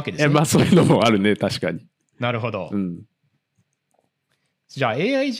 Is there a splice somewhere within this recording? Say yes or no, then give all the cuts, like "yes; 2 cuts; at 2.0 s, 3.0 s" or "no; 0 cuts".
no; 0 cuts